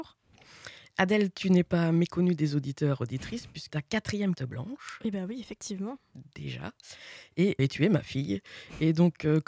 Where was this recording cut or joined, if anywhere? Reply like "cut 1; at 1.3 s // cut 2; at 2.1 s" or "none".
cut 1; at 3.7 s // cut 2; at 4.4 s // cut 3; at 7.6 s